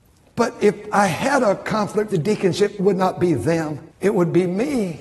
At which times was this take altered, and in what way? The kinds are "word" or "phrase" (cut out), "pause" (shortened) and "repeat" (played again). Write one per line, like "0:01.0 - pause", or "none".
0:02.1 - word
0:02.8 - word
0:03.9 - pause